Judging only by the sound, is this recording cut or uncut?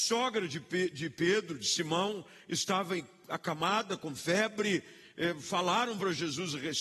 uncut